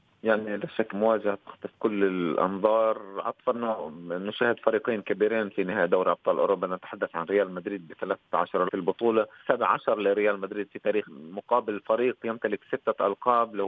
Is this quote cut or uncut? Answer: cut